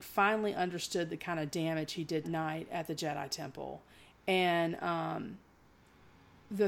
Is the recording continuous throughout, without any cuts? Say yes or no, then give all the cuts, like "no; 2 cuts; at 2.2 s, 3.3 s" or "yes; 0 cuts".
no; 1 cut; at 2.2 s